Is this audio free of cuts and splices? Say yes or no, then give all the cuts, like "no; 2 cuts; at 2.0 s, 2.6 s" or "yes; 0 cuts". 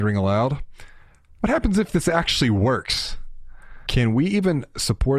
yes; 0 cuts